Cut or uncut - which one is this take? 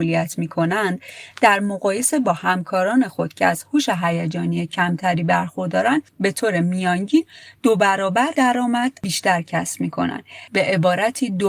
uncut